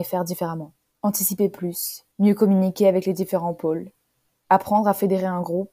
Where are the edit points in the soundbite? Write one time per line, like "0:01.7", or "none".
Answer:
0:00.9
0:02.1